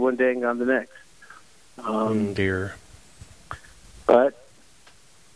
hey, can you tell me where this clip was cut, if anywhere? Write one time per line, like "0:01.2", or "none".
none